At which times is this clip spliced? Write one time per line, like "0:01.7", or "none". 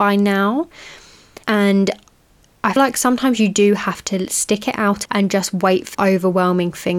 0:01.4
0:02.8
0:05.1
0:05.9